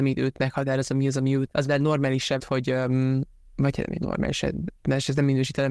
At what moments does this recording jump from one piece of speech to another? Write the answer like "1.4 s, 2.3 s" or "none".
1.5 s, 2.4 s